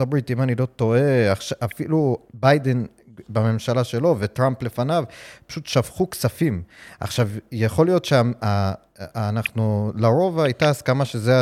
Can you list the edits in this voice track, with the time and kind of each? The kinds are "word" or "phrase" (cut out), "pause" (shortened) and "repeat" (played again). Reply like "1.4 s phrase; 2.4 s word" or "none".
none